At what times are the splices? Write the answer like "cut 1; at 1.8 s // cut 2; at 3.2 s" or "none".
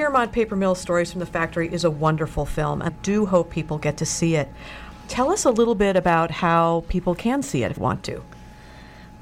cut 1; at 2.9 s // cut 2; at 7.8 s